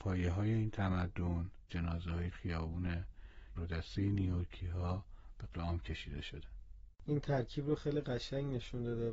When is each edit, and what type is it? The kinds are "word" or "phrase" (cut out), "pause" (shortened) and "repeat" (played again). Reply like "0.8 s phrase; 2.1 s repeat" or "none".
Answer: 1.7 s phrase; 2.3 s word; 3.6 s phrase; 5.5 s word; 6.9 s pause